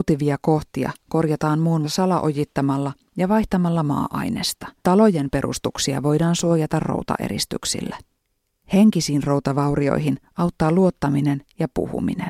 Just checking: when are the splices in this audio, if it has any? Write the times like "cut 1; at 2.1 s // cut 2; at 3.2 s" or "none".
cut 1; at 1.8 s // cut 2; at 4.8 s // cut 3; at 8.2 s